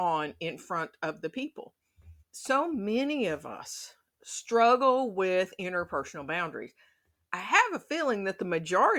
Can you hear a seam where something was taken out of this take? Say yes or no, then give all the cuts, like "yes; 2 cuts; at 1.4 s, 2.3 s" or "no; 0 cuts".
yes; 1 cut; at 2.2 s